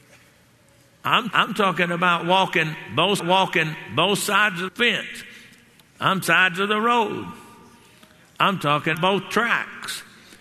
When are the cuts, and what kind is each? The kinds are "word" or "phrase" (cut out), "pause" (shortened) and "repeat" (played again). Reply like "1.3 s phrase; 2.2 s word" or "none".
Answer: 1.3 s word; 3.2 s repeat; 4.7 s word; 6.2 s phrase; 8.9 s word

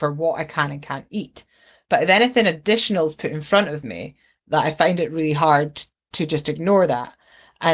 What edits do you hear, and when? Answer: none

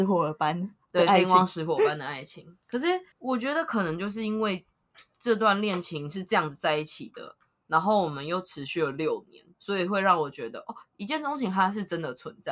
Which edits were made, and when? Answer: 3.1 s pause; 9.5 s pause

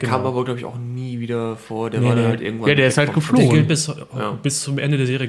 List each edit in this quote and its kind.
none

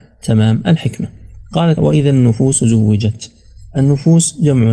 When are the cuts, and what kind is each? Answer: 1.8 s word

